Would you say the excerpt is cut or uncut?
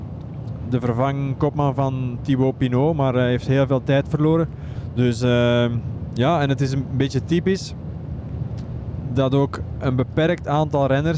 uncut